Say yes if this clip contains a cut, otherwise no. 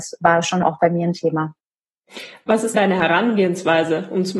yes